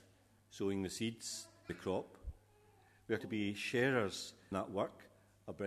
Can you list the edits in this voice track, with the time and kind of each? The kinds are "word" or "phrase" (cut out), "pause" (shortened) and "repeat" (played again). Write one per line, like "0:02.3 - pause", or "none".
0:01.7 - word
0:03.2 - word
0:04.5 - word